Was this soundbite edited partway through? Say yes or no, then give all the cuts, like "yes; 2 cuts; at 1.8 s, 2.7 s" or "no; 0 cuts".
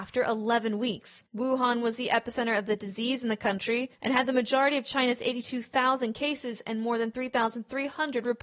yes; 2 cuts; at 1.3 s, 4.0 s